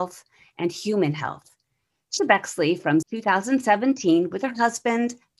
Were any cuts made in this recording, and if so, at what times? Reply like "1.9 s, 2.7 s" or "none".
2.2 s, 3.0 s